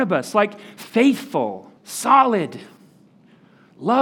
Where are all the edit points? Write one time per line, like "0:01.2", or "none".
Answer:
0:01.8